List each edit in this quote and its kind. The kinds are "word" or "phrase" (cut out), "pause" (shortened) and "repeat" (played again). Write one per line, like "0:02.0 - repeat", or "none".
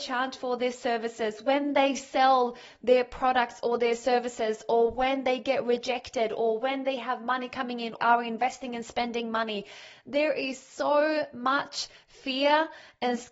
0:08.0 - phrase